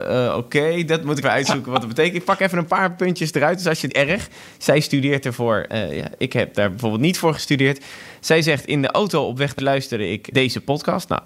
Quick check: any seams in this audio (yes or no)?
yes